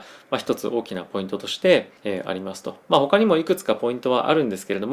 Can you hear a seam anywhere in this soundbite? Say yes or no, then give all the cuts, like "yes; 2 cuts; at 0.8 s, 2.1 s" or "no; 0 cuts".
yes; 1 cut; at 2.0 s